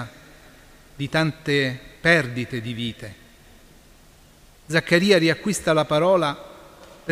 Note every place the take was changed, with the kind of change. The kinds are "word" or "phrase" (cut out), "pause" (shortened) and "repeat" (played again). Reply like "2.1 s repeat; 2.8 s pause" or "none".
2.0 s pause